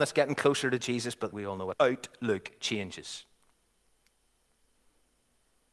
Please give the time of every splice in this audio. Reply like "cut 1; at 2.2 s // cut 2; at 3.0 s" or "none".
cut 1; at 1.3 s // cut 2; at 1.7 s